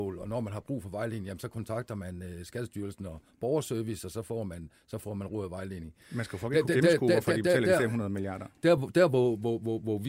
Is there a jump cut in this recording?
no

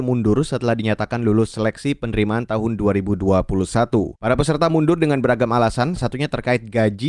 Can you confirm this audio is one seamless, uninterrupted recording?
no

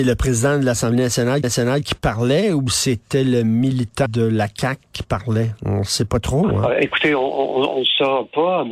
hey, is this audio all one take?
no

